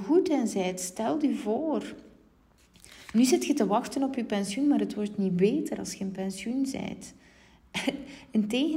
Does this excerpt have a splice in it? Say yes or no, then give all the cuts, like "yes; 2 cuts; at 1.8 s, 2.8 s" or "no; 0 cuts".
no; 0 cuts